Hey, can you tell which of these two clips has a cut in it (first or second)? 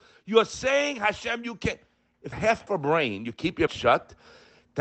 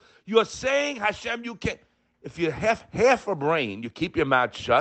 first